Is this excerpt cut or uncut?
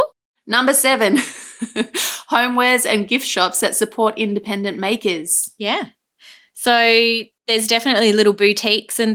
uncut